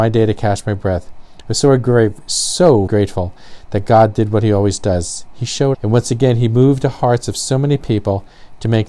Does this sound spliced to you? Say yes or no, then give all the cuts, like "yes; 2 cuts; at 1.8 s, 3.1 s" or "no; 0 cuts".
yes; 2 cuts; at 2.9 s, 5.7 s